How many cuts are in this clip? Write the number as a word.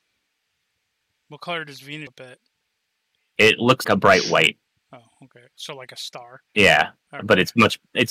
three